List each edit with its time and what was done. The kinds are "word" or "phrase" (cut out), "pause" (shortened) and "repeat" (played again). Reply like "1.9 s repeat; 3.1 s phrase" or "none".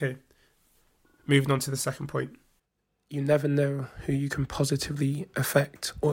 2.6 s pause